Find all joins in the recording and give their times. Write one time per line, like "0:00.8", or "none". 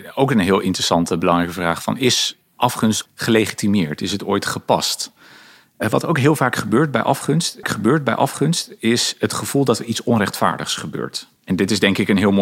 0:03.1
0:07.6
0:11.4